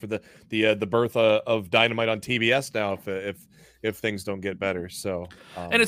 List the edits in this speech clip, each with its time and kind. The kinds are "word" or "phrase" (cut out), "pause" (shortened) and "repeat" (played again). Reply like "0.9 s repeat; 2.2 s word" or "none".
none